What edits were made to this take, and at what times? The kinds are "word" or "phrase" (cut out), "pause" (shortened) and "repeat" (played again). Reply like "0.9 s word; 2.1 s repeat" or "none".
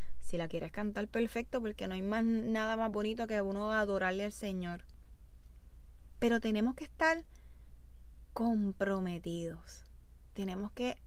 none